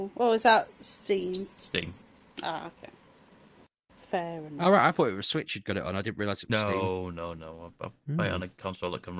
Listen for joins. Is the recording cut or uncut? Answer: uncut